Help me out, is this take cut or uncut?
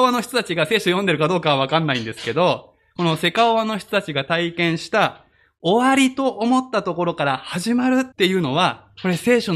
cut